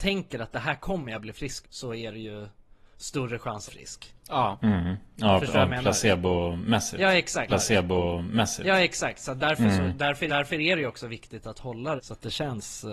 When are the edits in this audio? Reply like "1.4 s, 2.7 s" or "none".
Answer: 1.6 s, 3.7 s, 4.2 s, 7.5 s, 10.3 s, 12.0 s